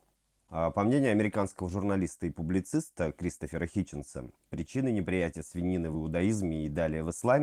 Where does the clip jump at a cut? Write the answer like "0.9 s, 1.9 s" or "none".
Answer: none